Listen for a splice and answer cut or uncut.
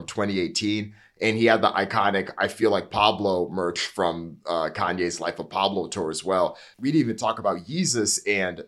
uncut